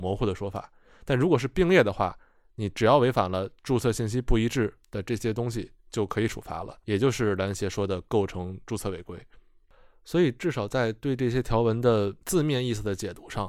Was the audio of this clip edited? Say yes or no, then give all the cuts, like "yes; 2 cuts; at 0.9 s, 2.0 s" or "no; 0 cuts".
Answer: yes; 2 cuts; at 6.8 s, 12.2 s